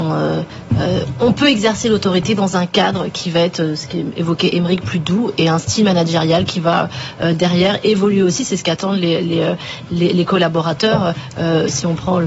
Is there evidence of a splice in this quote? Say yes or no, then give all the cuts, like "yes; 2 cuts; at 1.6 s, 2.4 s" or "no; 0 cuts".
no; 0 cuts